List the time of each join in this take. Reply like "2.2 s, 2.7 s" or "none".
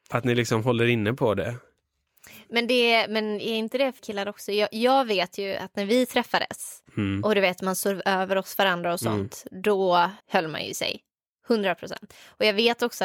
4.0 s, 10.2 s